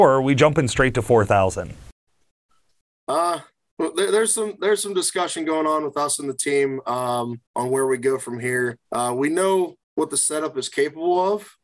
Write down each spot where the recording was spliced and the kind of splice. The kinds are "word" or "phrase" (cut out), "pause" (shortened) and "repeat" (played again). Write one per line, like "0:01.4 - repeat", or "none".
0:07.5 - pause
0:08.8 - pause
0:09.8 - pause